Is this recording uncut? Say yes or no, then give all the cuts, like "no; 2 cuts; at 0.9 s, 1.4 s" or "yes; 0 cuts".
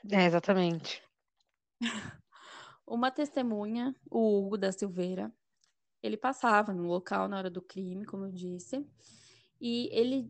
yes; 0 cuts